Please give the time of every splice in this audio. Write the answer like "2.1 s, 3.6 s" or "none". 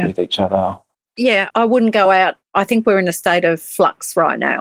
none